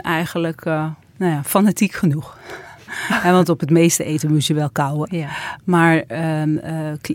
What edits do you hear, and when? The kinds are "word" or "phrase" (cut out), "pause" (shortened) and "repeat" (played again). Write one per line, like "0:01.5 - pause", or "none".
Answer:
0:01.0 - pause